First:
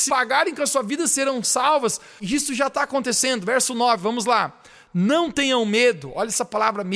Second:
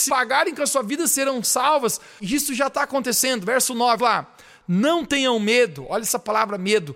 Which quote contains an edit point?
second; 1 cut; at 4.0 s

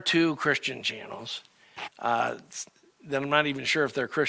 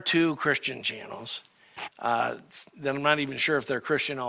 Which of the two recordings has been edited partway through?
second; 1 cut; at 2.7 s

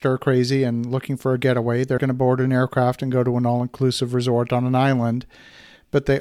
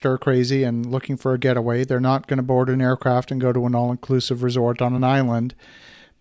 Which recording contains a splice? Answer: first; 1 cut; at 2.0 s

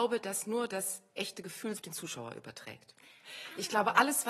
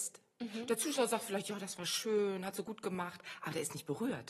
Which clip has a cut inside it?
first; 2 cuts; at 1.2 s, 1.7 s

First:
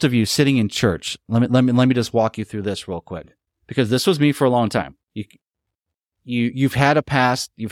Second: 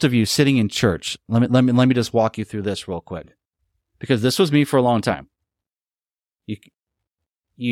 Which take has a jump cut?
first; 2 cuts; at 3.5 s, 5.0 s

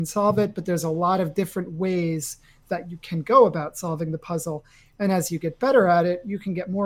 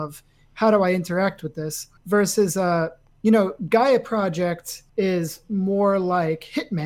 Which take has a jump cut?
second; 3 cuts; at 2.0 s, 3.1 s, 4.9 s

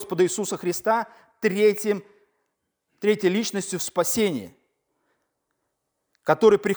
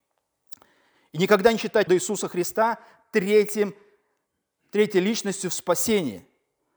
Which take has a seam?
second; 1 cut; at 1.9 s

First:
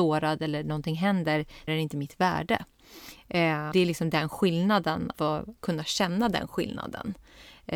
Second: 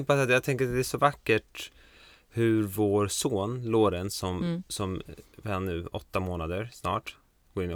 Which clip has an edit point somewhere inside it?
first; 4 cuts; at 1.7 s, 3.7 s, 5.1 s, 5.6 s

